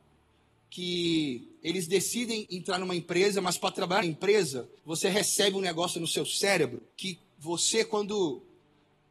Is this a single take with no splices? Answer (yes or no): no